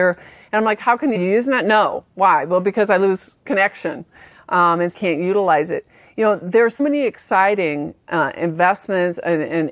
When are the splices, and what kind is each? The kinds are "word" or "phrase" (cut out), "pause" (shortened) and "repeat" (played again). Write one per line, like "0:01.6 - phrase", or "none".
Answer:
0:01.2 - phrase
0:03.4 - pause
0:04.9 - phrase
0:06.8 - word